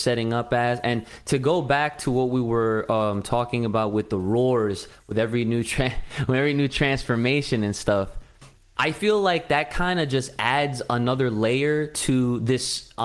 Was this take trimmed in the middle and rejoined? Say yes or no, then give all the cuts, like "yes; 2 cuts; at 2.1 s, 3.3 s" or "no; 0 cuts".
no; 0 cuts